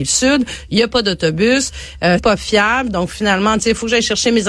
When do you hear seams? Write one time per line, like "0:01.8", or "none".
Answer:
0:02.2